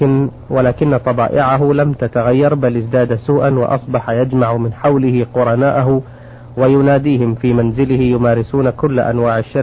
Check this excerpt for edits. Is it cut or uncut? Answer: uncut